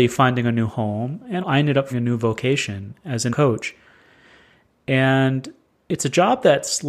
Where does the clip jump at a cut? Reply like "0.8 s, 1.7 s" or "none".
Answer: 1.4 s, 1.9 s, 3.3 s